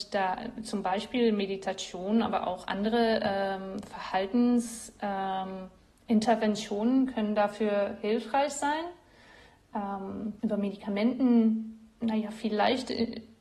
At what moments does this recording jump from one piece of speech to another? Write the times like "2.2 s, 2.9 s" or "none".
10.4 s